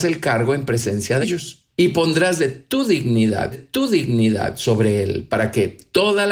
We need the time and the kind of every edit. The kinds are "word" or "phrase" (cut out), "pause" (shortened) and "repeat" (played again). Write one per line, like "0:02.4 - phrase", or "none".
0:01.2 - word
0:01.7 - pause
0:03.5 - repeat